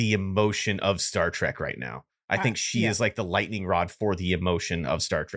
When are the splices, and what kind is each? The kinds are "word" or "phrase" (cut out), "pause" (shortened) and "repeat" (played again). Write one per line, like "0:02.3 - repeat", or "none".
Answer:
none